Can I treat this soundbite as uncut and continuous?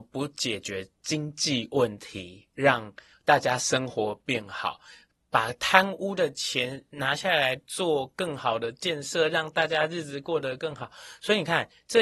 yes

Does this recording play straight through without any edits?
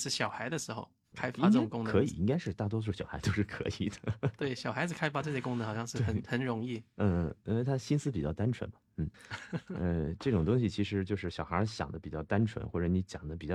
no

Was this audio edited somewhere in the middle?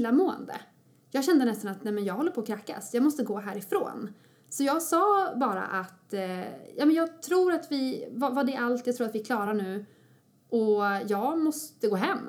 no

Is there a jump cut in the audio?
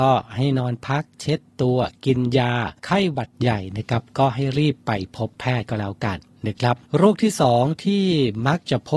yes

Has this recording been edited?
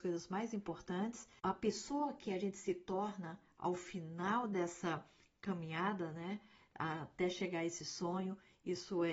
no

